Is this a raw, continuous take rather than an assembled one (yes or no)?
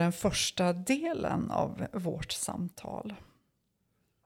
yes